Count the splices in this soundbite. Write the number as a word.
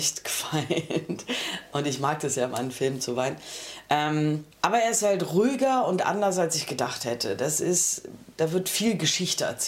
one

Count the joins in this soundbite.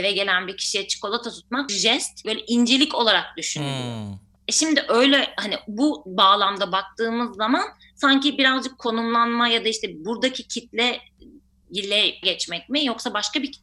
three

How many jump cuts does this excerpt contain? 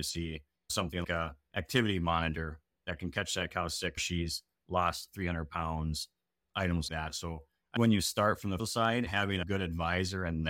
six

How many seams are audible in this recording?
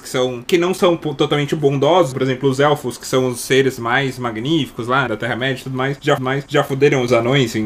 three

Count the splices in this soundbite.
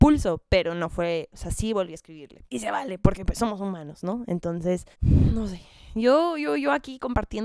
two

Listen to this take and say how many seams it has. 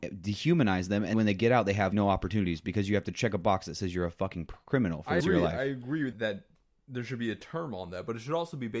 four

